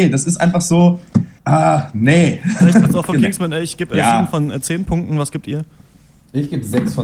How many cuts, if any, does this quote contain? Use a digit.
2